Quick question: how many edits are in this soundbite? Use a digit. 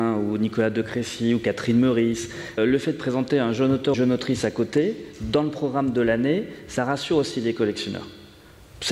2